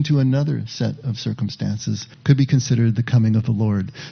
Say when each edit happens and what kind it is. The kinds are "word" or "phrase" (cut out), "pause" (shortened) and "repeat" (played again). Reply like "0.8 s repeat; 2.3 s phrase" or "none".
2.1 s pause

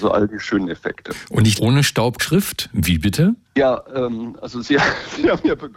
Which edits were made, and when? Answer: 1.6 s word; 2.2 s word; 3.4 s pause

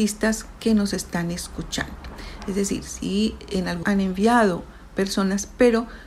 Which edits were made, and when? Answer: 3.8 s word

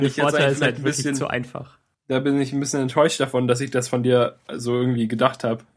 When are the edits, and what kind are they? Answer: 1.9 s pause

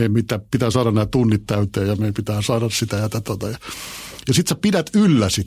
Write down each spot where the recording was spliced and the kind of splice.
3.2 s word

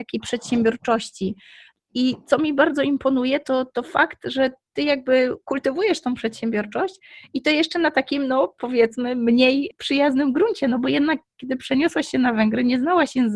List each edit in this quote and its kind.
none

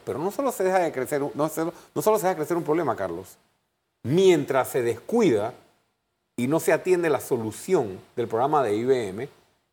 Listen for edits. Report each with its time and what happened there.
none

